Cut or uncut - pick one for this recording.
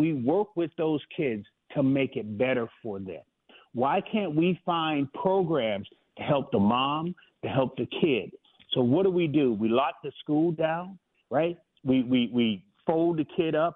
uncut